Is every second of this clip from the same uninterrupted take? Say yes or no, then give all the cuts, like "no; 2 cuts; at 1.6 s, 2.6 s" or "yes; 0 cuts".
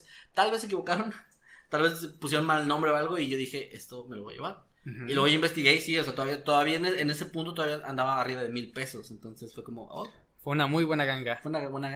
yes; 0 cuts